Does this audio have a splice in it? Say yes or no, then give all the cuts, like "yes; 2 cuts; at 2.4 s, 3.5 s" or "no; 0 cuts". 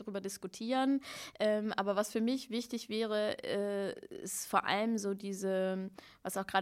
no; 0 cuts